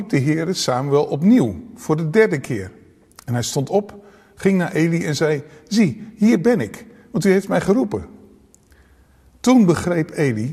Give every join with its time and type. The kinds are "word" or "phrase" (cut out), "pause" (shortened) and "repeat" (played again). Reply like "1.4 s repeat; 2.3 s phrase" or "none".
none